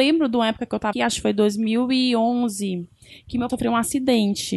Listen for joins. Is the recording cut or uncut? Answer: cut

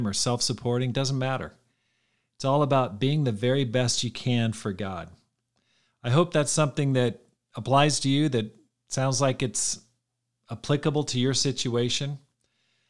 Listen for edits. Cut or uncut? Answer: uncut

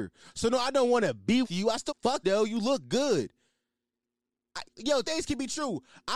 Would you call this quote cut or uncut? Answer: cut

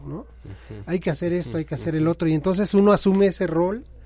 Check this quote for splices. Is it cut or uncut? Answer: uncut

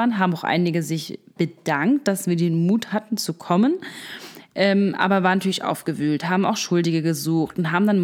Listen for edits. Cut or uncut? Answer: uncut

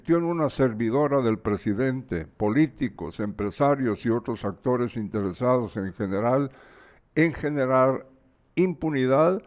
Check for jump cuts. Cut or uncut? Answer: uncut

